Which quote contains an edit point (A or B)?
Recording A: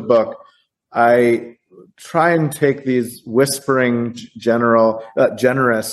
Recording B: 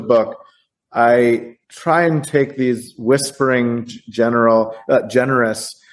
B